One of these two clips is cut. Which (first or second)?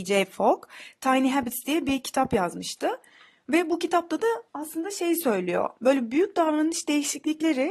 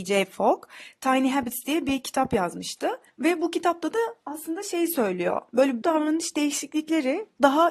second